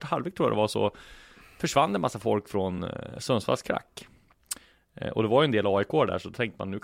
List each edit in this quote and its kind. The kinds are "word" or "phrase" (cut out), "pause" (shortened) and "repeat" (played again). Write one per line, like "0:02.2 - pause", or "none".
none